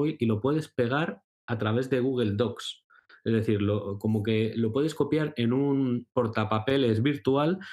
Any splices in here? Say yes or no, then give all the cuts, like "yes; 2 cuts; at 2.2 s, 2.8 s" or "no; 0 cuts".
no; 0 cuts